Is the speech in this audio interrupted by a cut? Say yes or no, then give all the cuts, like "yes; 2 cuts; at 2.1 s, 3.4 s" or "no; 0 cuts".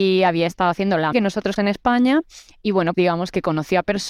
yes; 3 cuts; at 1.1 s, 1.6 s, 2.9 s